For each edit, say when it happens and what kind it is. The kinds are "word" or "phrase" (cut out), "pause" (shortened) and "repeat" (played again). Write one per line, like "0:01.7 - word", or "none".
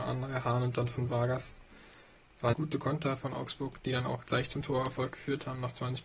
0:02.5 - phrase